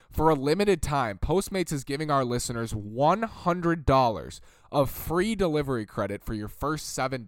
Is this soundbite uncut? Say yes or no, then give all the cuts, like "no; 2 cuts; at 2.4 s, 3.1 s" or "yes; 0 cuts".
yes; 0 cuts